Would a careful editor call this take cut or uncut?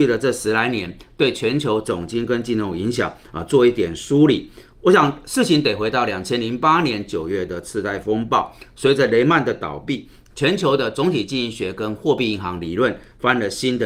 uncut